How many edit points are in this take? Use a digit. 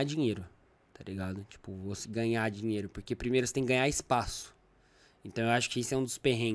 1